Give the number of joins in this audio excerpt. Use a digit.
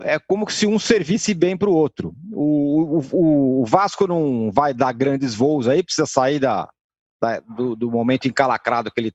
0